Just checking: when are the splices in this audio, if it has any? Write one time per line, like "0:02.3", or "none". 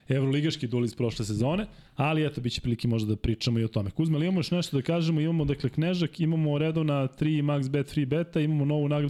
0:01.9